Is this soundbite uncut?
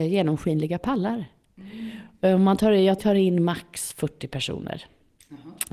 no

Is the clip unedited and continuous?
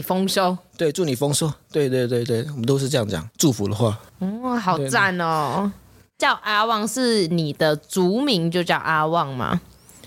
yes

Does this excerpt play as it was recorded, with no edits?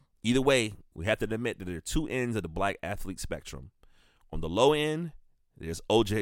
yes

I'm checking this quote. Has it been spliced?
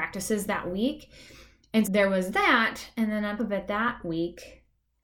yes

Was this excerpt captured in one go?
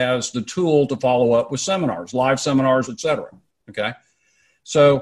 no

